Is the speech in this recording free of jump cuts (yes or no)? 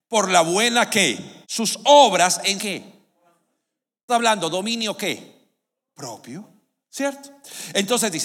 no